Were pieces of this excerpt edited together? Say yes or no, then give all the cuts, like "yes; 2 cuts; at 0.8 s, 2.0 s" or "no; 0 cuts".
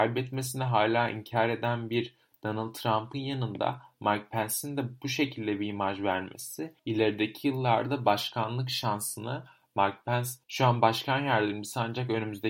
no; 0 cuts